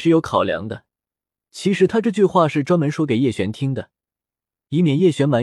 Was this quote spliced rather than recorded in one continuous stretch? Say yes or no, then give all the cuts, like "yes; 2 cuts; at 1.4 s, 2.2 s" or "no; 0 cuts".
no; 0 cuts